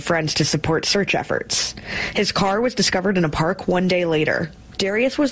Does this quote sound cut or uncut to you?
uncut